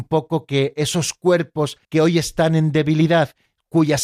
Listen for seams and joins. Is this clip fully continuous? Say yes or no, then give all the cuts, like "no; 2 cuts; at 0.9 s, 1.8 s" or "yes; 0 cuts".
no; 1 cut; at 1.8 s